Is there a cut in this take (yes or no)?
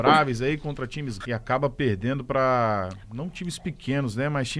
yes